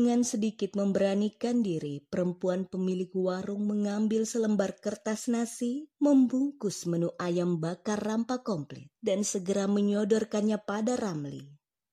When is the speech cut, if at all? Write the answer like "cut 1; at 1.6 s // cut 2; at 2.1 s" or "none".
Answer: cut 1; at 5.9 s

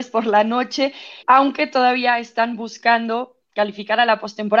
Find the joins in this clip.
cut 1; at 1.2 s

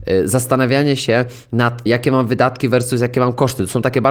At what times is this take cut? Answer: cut 1; at 1.9 s

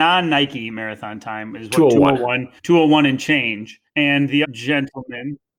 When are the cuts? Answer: cut 1; at 2.6 s // cut 2; at 3.9 s // cut 3; at 4.4 s

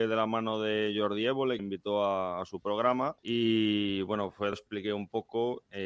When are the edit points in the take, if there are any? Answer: cut 1; at 1.6 s // cut 2; at 3.2 s // cut 3; at 4.5 s

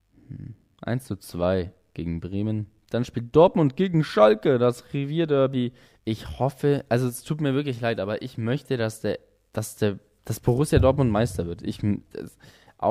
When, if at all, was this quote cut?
cut 1; at 5.8 s

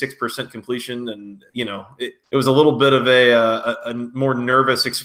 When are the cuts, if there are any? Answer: cut 1; at 1.5 s // cut 2; at 2.2 s

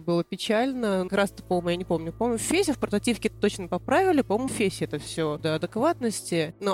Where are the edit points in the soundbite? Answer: cut 1; at 1.1 s // cut 2; at 4.5 s // cut 3; at 5.4 s

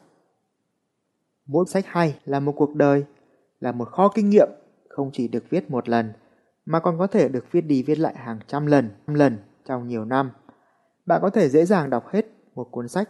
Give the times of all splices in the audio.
cut 1; at 1.7 s // cut 2; at 2.2 s // cut 3; at 9.1 s

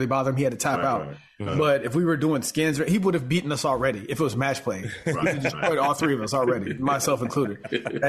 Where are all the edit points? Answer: none

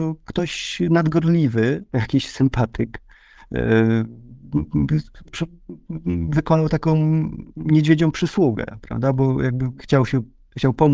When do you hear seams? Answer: cut 1; at 1.9 s // cut 2; at 5.2 s // cut 3; at 7.5 s // cut 4; at 9.8 s

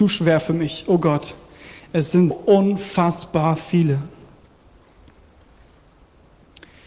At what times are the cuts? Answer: cut 1; at 2.3 s

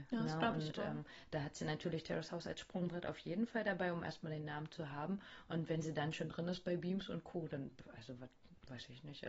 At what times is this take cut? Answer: none

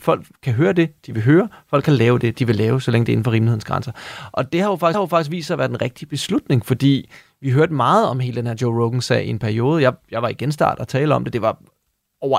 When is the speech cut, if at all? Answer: cut 1; at 4.9 s

